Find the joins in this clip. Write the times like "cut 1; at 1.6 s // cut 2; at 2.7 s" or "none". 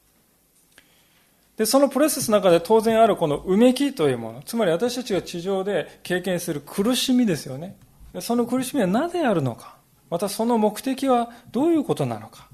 cut 1; at 8.1 s // cut 2; at 9.9 s

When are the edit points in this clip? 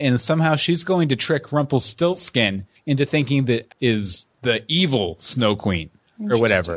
cut 1; at 3.7 s

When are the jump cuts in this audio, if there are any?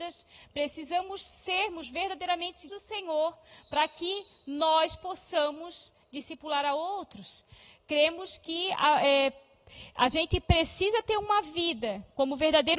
cut 1; at 2.7 s

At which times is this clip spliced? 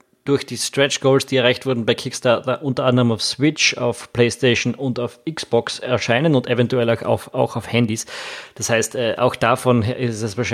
none

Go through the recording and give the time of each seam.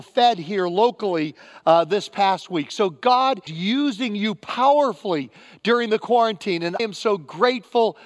cut 1; at 3.5 s // cut 2; at 6.8 s

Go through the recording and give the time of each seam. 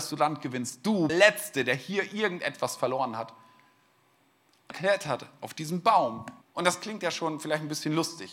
cut 1; at 1.1 s // cut 2; at 4.7 s // cut 3; at 6.4 s

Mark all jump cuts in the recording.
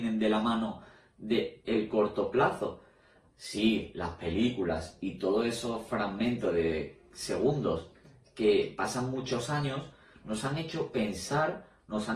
none

